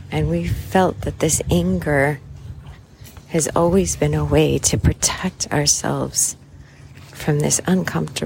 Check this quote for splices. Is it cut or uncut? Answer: uncut